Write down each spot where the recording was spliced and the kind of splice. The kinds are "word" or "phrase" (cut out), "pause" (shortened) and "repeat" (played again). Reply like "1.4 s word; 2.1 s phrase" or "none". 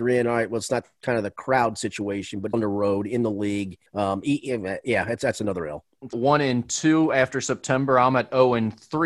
2.5 s word; 3.9 s pause; 6.1 s phrase